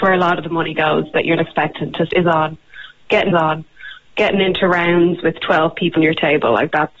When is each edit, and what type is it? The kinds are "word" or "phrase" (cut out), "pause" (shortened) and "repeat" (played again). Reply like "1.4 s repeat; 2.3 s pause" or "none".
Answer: 1.4 s word; 2.1 s word; 3.3 s repeat; 6.0 s word